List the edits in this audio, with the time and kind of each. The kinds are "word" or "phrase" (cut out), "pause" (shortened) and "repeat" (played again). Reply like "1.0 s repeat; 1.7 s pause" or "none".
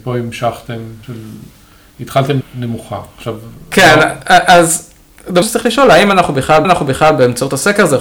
1.0 s word; 2.4 s word; 5.4 s word; 6.6 s repeat